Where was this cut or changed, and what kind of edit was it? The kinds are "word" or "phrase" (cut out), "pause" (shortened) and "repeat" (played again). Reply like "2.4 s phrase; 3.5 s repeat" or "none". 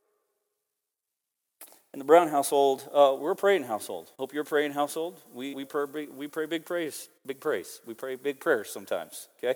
3.2 s word; 4.1 s pause; 5.5 s word; 7.2 s pause